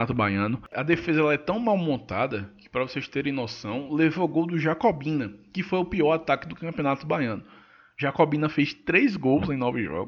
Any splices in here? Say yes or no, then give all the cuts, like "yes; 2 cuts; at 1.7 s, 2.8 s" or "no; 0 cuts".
no; 0 cuts